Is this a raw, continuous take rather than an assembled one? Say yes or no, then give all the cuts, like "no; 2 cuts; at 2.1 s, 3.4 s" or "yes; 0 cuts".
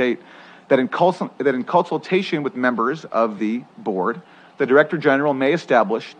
yes; 0 cuts